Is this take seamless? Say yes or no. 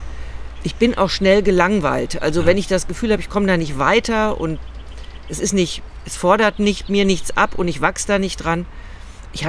yes